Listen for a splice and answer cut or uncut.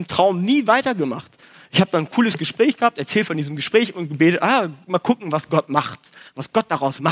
uncut